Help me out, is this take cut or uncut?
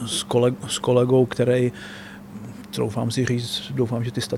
uncut